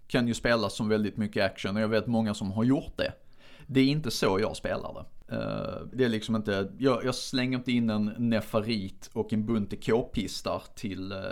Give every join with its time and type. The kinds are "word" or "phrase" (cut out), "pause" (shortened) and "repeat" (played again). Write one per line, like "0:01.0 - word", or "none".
0:05.9 - word